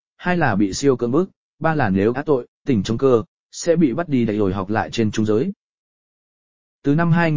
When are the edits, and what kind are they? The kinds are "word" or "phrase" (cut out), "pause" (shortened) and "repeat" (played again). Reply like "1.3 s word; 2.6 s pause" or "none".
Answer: 2.1 s word; 2.7 s word

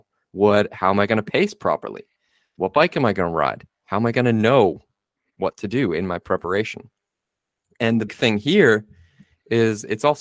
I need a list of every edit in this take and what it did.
8.1 s word

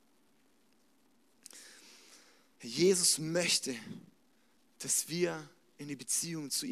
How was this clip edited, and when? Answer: none

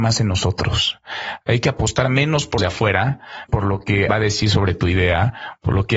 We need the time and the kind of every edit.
2.6 s word; 3.5 s word; 4.1 s word

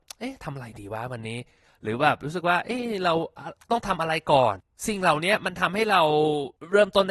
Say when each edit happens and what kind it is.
none

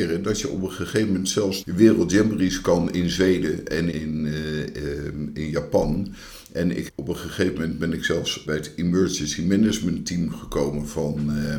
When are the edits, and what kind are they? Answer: 1.6 s word; 3.9 s word; 6.9 s word; 8.5 s word

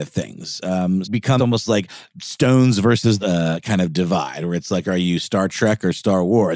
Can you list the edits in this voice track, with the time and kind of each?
1.0 s phrase; 1.4 s word; 3.2 s phrase

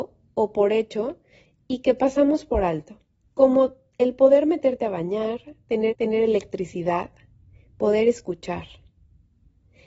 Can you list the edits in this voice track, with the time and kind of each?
3.2 s pause; 5.9 s repeat

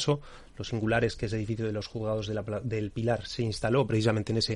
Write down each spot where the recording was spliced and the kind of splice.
none

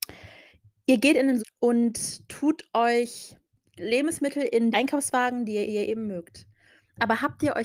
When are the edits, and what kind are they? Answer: 1.4 s word; 3.5 s pause; 4.7 s word; 5.7 s repeat

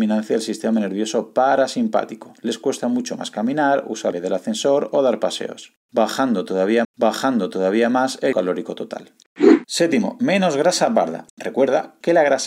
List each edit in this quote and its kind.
4.1 s phrase; 6.8 s repeat; 8.3 s word; 11.3 s pause

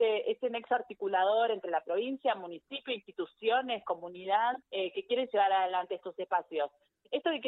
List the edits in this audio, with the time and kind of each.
4.6 s pause

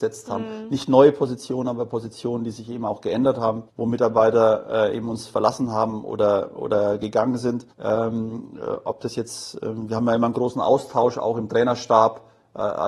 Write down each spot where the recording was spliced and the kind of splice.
3.7 s pause; 7.7 s pause

